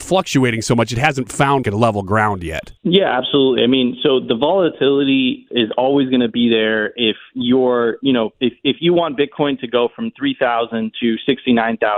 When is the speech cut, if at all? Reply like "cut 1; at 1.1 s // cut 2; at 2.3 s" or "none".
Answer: cut 1; at 1.6 s // cut 2; at 2.8 s // cut 3; at 5.5 s